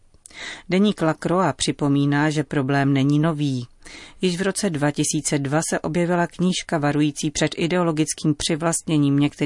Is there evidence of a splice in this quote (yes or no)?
no